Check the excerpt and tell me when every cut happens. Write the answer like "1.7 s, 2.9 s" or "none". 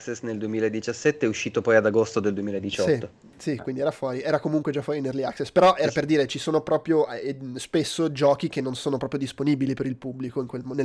none